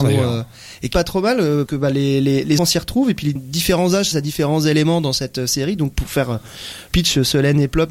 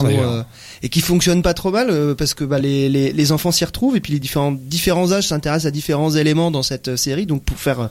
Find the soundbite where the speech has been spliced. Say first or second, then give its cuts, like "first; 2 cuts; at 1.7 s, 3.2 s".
first; 6 cuts; at 0.9 s, 1.7 s, 2.6 s, 3.4 s, 4.1 s, 6.9 s